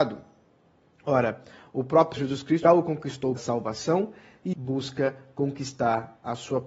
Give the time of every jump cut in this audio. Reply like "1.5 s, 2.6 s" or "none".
2.2 s, 2.6 s, 3.4 s, 4.5 s